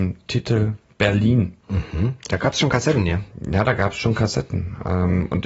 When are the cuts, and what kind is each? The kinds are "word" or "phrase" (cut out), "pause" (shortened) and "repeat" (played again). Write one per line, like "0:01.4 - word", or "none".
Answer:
0:01.6 - pause